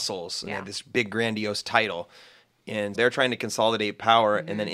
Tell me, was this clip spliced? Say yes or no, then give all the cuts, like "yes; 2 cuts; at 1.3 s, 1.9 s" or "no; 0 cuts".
yes; 1 cut; at 2.9 s